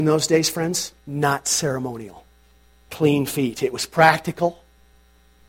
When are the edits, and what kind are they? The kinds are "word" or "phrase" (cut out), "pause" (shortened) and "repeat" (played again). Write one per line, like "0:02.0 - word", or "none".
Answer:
0:01.0 - pause
0:02.9 - word